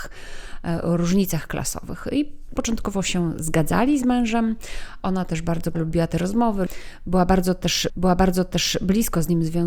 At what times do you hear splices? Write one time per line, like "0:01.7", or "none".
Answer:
0:02.6
0:05.7
0:07.9